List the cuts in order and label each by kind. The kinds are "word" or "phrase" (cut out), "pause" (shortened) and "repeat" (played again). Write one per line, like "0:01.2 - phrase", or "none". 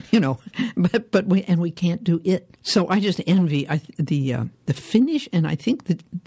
0:02.6 - pause
0:04.5 - pause